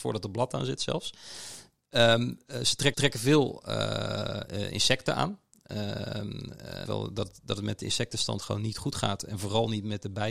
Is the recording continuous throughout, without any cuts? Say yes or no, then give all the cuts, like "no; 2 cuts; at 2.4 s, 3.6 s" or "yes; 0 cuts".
no; 2 cuts; at 2.9 s, 6.9 s